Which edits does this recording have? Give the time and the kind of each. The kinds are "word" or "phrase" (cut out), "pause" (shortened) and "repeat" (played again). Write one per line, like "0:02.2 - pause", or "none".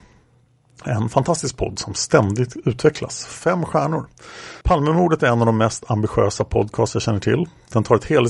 0:04.6 - pause